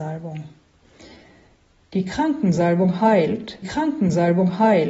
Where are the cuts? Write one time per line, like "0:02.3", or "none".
0:03.6